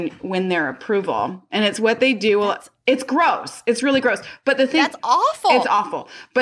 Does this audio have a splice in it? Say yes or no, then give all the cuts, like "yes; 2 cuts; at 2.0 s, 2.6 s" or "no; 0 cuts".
no; 0 cuts